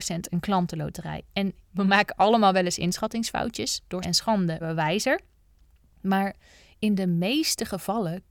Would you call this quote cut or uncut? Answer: cut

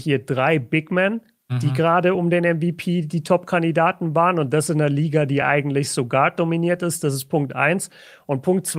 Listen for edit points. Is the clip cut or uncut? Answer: uncut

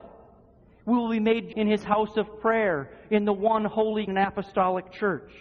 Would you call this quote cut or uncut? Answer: cut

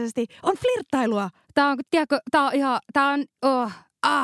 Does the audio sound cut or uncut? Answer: cut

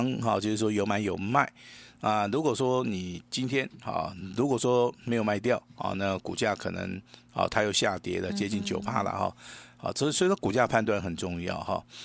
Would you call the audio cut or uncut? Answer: uncut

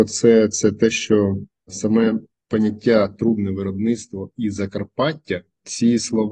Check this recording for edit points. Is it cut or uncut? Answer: uncut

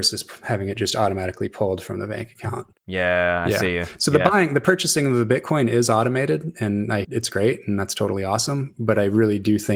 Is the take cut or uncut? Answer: cut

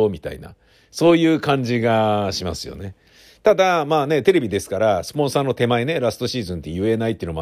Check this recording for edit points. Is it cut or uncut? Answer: uncut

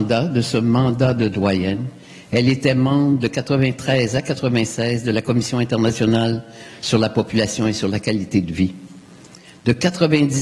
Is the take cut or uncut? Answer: uncut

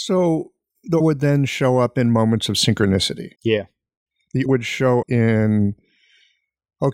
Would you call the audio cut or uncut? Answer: cut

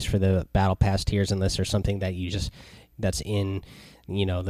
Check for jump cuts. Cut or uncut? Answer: uncut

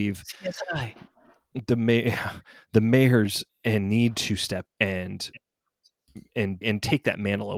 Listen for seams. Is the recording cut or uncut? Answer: cut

